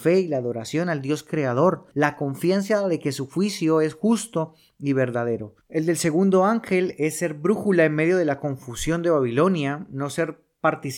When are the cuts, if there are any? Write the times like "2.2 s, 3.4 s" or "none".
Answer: none